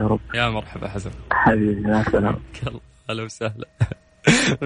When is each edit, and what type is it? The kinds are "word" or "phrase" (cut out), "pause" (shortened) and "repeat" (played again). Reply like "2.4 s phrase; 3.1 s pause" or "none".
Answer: none